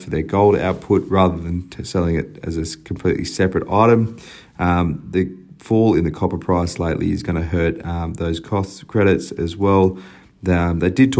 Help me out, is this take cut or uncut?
uncut